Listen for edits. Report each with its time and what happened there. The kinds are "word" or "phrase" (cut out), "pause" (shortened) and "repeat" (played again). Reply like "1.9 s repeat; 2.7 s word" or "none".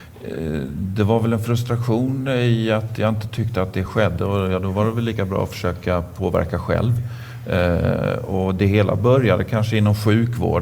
none